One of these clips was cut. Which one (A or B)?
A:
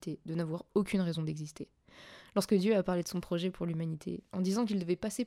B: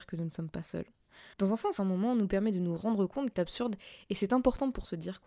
B